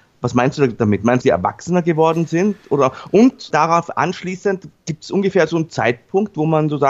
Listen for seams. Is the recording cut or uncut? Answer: cut